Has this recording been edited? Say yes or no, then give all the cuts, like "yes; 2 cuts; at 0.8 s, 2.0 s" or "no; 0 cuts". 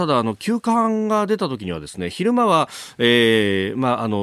no; 0 cuts